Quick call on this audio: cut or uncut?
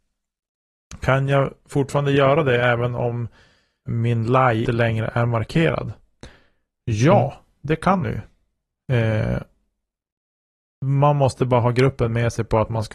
cut